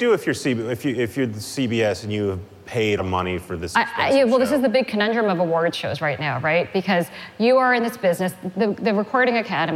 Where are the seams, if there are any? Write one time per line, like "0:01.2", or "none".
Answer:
0:03.0